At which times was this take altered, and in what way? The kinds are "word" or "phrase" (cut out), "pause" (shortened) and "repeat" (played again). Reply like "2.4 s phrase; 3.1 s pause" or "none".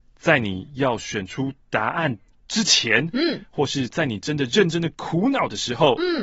none